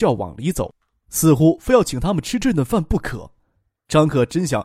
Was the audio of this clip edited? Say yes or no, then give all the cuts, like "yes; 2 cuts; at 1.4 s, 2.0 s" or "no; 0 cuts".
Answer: no; 0 cuts